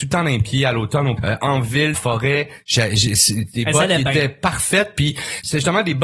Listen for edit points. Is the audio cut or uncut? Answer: cut